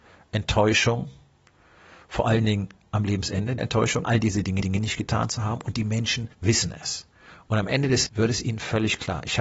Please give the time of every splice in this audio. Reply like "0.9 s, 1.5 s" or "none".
3.6 s, 4.0 s, 4.6 s, 6.3 s, 8.1 s